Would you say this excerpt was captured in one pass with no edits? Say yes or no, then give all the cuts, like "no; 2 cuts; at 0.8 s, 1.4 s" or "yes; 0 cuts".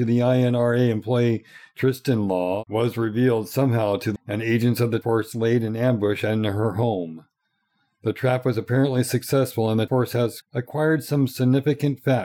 no; 4 cuts; at 4.2 s, 5.0 s, 9.9 s, 10.4 s